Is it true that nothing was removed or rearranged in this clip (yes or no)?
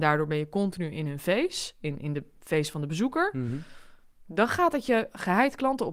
yes